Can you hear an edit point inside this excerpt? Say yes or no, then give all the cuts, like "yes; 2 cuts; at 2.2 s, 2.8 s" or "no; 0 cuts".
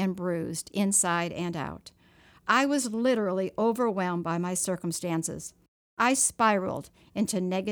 no; 0 cuts